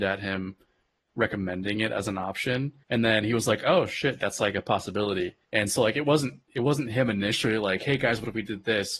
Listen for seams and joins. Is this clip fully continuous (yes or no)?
no